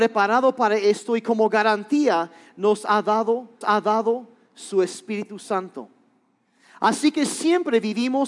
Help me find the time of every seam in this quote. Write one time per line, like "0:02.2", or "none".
0:03.6